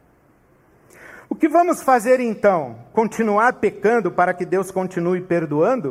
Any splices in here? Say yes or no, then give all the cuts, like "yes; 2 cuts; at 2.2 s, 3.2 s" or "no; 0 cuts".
no; 0 cuts